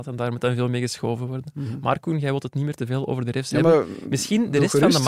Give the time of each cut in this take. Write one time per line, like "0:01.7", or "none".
none